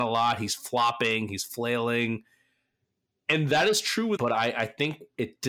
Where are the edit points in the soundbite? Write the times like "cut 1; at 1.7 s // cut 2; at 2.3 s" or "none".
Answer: cut 1; at 4.2 s